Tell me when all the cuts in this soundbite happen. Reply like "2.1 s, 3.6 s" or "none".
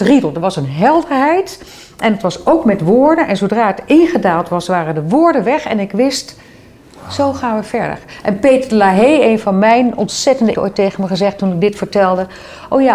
10.5 s